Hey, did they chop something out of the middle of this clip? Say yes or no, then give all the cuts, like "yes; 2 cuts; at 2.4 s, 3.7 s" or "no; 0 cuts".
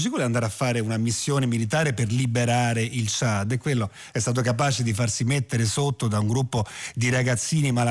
no; 0 cuts